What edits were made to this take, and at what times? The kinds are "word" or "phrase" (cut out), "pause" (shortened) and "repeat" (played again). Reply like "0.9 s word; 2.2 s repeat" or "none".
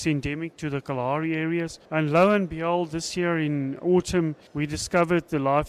1.9 s pause; 4.5 s pause